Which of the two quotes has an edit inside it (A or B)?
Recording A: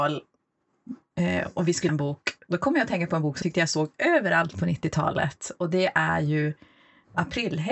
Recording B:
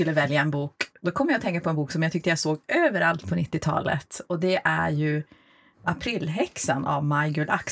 A